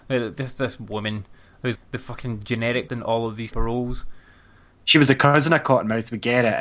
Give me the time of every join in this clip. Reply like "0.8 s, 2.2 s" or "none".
1.7 s, 2.9 s, 3.5 s